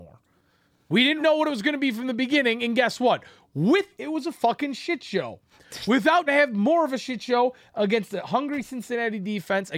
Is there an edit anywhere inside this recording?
yes; 3 cuts; at 1.2 s, 3.9 s, 6.3 s

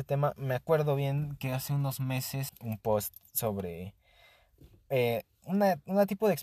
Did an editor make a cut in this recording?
yes; 1 cut; at 2.5 s

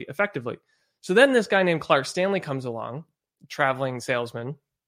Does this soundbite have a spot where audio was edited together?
no; 0 cuts

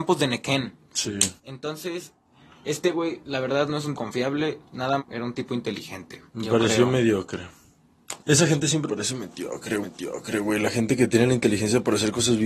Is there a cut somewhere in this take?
yes; 7 cuts; at 1.4 s, 3.9 s, 5.0 s, 6.3 s, 8.2 s, 8.9 s, 9.8 s

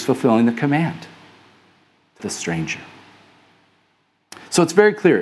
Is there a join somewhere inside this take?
yes; 1 cut; at 2.2 s

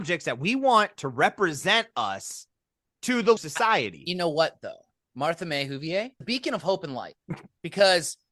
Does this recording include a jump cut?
yes; 2 cuts; at 3.4 s, 6.2 s

